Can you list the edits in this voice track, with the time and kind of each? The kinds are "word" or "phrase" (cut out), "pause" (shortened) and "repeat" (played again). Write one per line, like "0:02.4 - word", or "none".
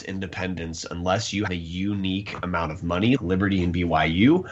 0:01.5 - word
0:03.2 - word